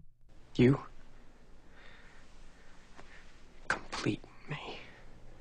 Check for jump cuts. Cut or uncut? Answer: uncut